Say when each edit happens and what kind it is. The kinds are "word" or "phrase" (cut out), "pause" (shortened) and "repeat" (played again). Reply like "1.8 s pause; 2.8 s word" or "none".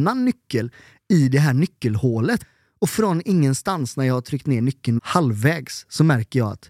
5.0 s word